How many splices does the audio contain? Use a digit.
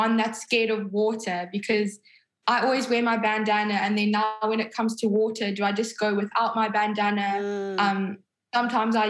0